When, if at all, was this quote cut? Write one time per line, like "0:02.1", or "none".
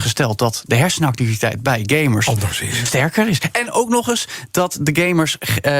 none